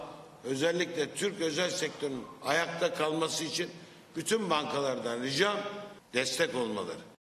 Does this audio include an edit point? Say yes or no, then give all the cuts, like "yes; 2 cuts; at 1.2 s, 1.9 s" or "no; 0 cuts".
no; 0 cuts